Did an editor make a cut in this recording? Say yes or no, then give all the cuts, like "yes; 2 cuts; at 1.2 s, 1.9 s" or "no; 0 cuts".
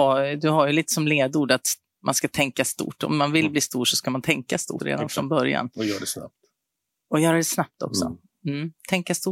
yes; 1 cut; at 4.8 s